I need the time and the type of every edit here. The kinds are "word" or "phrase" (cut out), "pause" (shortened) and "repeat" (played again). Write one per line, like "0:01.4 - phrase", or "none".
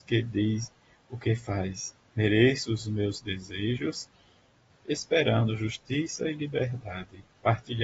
0:04.7 - word